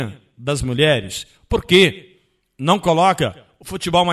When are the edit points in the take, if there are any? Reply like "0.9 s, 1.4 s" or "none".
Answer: none

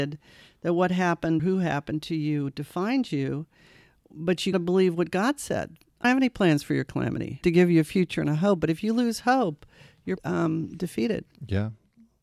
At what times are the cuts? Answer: 1.4 s, 4.5 s, 6.0 s, 7.4 s, 10.2 s

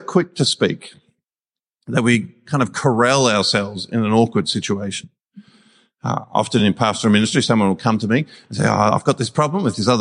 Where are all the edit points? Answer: none

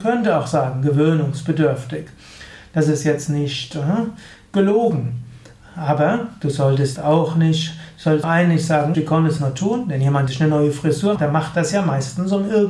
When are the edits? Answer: 7.0 s, 8.2 s, 8.9 s, 9.4 s, 10.3 s, 11.2 s

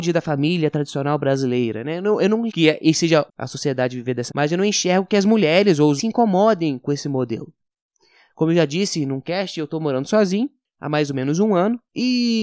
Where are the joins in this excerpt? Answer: 2.5 s, 3.3 s, 4.3 s, 6.0 s

